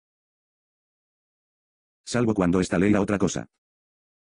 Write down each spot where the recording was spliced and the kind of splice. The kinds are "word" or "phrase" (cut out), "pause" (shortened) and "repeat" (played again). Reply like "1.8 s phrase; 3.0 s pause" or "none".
2.9 s word